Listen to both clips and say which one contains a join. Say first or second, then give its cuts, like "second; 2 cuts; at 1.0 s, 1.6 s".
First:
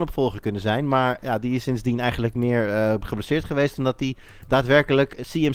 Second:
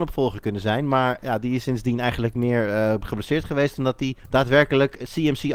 second; 1 cut; at 4.2 s